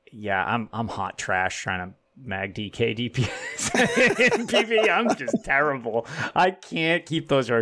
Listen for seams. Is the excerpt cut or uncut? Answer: uncut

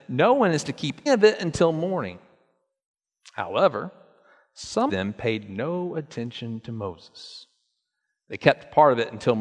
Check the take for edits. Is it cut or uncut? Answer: cut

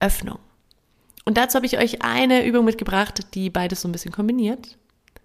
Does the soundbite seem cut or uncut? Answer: uncut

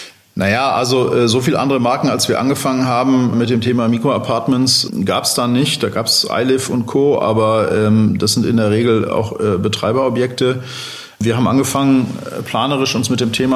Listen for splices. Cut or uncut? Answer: cut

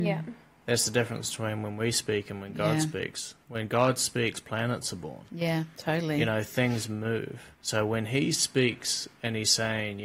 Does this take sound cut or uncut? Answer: cut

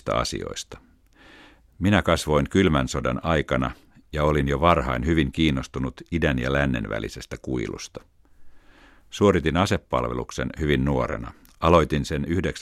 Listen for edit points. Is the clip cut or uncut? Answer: uncut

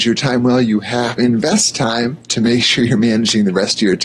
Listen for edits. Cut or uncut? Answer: cut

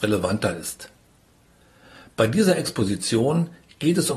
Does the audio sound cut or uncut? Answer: uncut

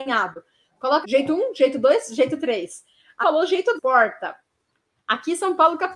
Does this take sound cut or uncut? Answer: cut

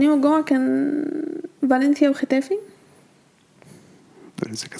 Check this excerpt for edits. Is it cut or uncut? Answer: uncut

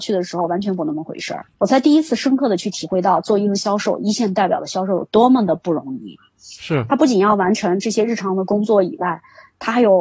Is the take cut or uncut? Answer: cut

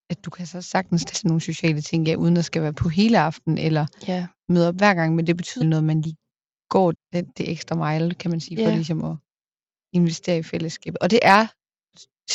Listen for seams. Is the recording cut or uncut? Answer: cut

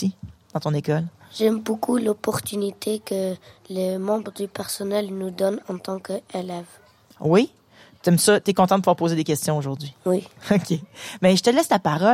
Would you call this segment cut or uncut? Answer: uncut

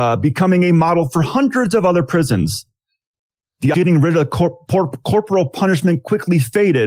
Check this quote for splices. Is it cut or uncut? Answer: cut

